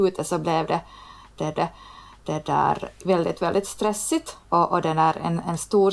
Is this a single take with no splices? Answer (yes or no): no